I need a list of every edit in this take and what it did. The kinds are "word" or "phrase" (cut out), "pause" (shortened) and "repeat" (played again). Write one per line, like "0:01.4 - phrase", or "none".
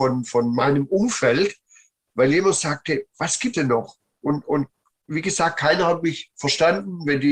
0:03.5 - word